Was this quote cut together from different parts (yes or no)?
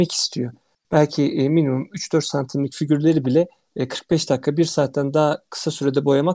no